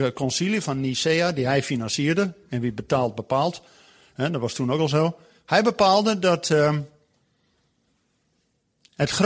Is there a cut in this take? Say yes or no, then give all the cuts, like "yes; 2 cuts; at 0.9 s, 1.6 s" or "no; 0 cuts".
no; 0 cuts